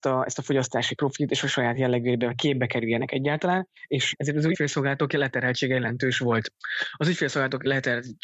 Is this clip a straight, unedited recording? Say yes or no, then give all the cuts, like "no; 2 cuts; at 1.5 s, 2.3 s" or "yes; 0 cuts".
yes; 0 cuts